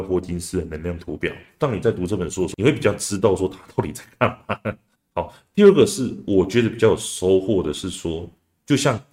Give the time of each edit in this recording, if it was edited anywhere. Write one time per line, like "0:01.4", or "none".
none